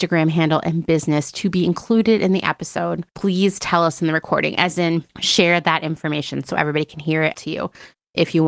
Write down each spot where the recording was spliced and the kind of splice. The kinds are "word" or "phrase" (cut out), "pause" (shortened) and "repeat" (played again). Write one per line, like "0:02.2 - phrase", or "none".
0:03.1 - pause
0:05.1 - pause
0:07.3 - phrase